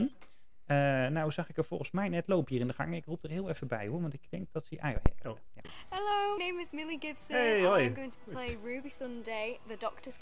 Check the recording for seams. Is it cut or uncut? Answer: cut